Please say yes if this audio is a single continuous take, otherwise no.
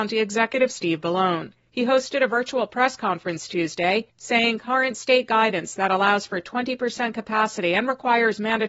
yes